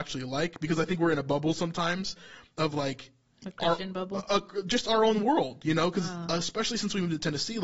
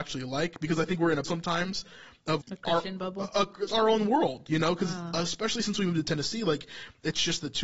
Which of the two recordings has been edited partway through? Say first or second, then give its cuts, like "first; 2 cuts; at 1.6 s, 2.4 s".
second; 3 cuts; at 1.2 s, 2.4 s, 3.7 s